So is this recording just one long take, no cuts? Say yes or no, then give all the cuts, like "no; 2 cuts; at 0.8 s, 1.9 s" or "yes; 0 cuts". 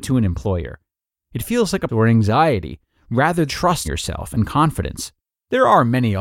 no; 4 cuts; at 1.9 s, 3.5 s, 3.8 s, 5.2 s